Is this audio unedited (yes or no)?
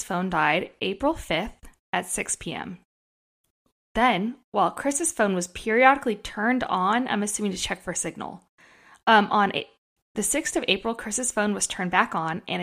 yes